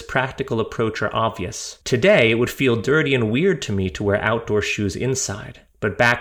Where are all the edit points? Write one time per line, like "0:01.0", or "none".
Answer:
0:01.8